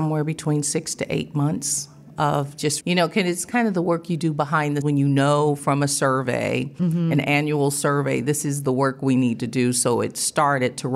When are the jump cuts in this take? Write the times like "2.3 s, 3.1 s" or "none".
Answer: 2.8 s, 4.8 s